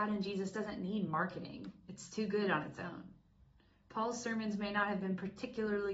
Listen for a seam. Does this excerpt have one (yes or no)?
no